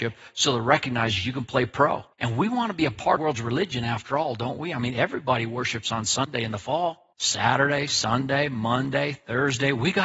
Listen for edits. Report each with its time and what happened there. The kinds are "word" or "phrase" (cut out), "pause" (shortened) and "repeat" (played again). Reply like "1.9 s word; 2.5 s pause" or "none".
2.1 s pause; 3.2 s phrase; 7.1 s pause